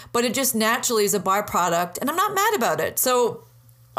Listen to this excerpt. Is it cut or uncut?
uncut